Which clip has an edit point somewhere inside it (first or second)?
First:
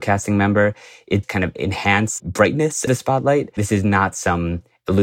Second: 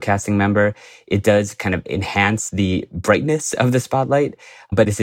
first